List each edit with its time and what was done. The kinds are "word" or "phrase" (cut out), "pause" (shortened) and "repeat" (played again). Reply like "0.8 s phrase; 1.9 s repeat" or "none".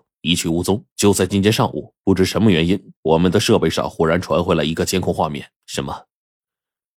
0.9 s pause; 3.0 s pause; 5.6 s pause

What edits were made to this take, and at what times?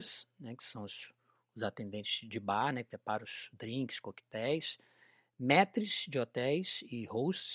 none

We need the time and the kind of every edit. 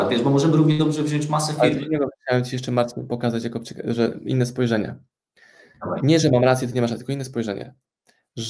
none

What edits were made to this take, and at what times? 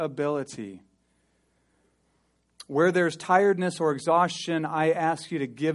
none

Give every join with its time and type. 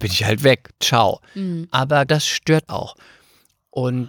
2.1 s word; 2.7 s word

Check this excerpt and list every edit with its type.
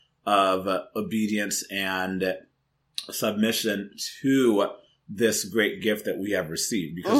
none

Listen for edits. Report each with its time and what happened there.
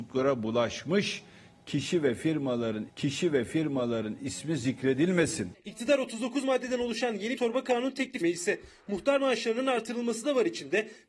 2.9 s repeat; 7.4 s word; 8.2 s word

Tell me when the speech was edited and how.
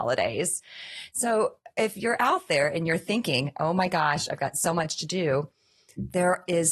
none

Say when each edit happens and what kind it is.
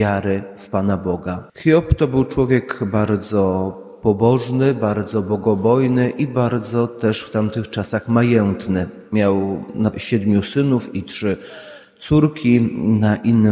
1.5 s pause; 9.9 s word

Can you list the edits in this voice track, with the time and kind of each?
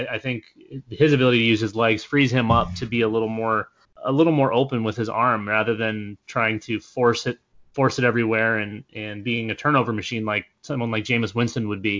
3.8 s pause

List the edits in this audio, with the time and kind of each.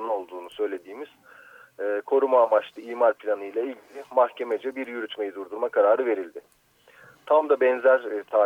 none

